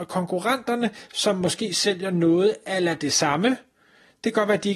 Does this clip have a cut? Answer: no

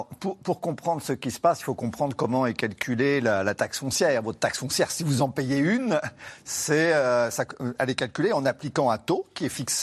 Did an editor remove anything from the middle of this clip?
no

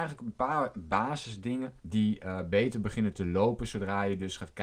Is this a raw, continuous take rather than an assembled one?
no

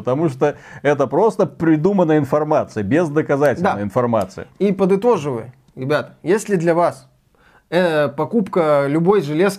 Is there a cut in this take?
no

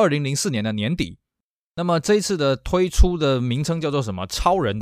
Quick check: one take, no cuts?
yes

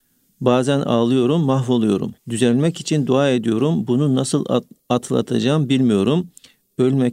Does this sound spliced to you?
yes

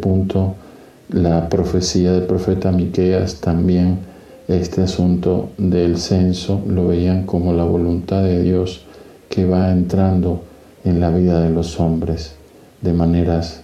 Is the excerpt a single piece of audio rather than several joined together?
yes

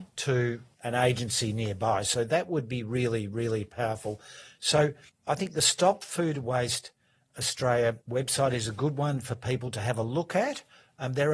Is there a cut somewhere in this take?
yes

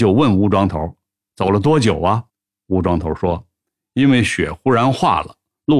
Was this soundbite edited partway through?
yes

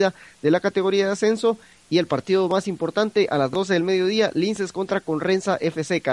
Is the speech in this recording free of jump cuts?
yes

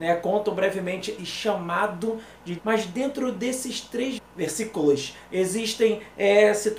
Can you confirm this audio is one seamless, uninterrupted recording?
no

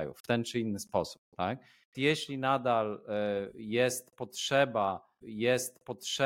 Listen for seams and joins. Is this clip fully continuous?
no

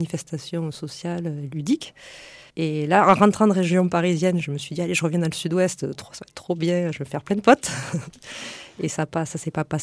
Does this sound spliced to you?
yes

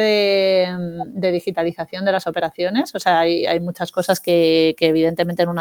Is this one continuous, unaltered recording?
yes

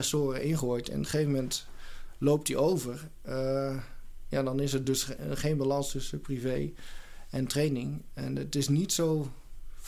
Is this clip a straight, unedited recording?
yes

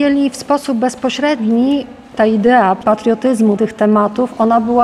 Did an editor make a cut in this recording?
yes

